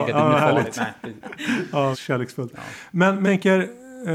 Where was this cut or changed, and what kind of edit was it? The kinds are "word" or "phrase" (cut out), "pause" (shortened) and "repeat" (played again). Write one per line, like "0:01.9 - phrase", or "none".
0:01.9 - phrase
0:03.2 - word